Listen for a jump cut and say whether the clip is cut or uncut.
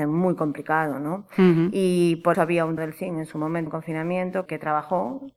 cut